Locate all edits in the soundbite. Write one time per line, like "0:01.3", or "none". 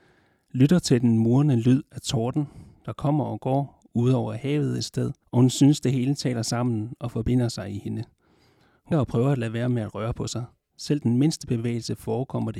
0:05.2
0:08.9